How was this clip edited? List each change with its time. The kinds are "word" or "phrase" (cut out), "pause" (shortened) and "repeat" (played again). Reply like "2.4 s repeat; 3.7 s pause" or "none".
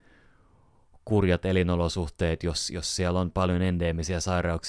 none